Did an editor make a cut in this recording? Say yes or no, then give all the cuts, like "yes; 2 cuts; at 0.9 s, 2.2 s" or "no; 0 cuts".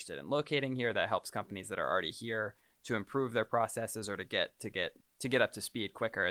no; 0 cuts